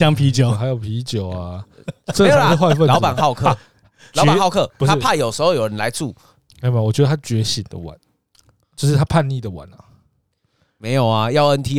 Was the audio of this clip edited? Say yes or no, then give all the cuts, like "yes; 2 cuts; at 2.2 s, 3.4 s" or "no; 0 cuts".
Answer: no; 0 cuts